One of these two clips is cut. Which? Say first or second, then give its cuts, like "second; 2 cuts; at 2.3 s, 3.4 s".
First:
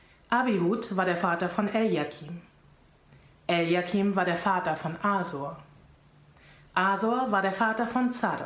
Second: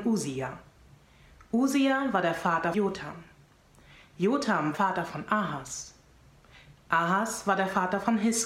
second; 2 cuts; at 2.7 s, 4.7 s